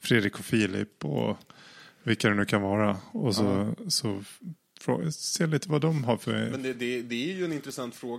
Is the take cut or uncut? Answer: uncut